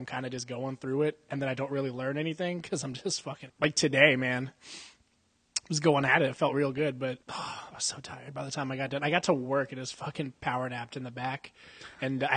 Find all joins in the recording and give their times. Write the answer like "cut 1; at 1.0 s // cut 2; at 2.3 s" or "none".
cut 1; at 3.5 s // cut 2; at 7.2 s